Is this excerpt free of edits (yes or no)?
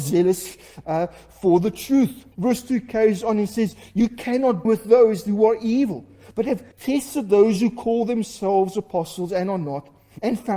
no